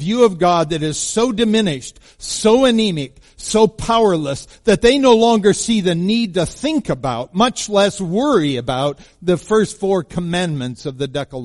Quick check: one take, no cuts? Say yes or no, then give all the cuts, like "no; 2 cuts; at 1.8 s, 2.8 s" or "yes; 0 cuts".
yes; 0 cuts